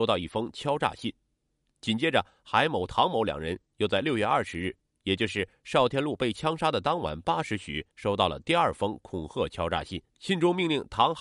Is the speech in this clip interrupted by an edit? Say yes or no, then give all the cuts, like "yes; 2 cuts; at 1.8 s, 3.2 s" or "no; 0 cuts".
yes; 2 cuts; at 7.9 s, 10.1 s